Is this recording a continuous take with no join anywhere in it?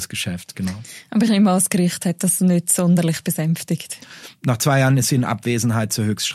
yes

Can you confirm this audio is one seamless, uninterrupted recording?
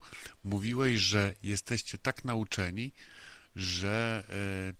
yes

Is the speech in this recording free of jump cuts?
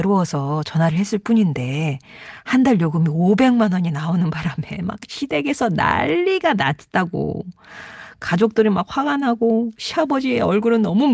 yes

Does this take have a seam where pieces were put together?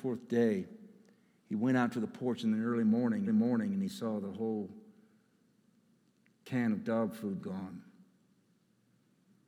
yes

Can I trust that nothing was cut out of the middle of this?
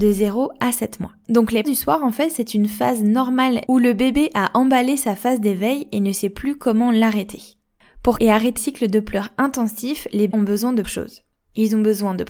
no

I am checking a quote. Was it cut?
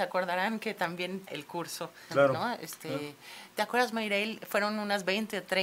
yes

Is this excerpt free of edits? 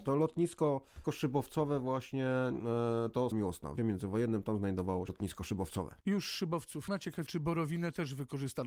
no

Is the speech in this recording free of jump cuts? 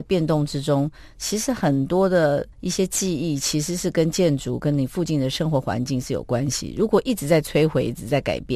no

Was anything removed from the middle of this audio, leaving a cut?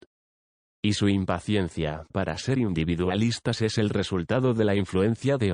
no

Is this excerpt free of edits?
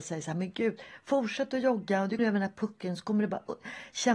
no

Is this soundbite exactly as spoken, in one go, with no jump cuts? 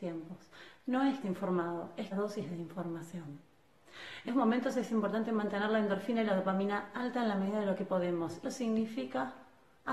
no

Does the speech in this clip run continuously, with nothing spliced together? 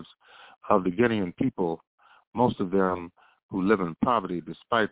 yes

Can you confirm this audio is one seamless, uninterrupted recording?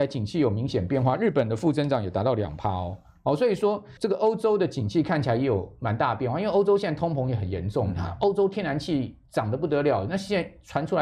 no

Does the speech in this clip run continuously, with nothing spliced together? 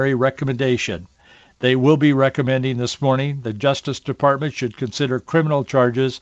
yes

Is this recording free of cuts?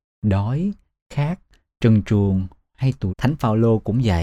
no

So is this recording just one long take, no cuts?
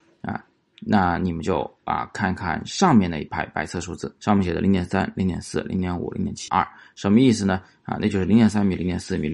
no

